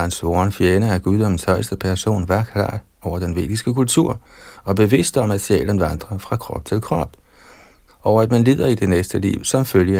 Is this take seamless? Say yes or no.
yes